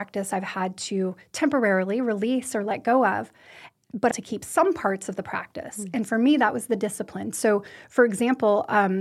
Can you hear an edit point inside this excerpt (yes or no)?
yes